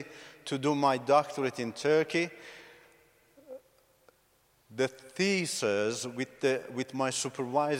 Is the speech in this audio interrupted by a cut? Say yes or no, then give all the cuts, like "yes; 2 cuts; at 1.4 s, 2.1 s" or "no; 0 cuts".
no; 0 cuts